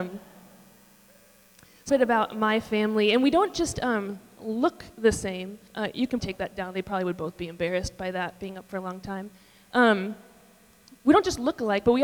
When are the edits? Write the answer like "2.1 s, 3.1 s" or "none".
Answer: 1.9 s, 5.7 s, 6.2 s